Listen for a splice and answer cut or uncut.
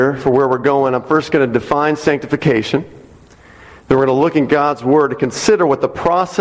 uncut